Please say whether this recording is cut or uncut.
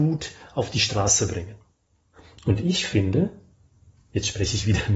uncut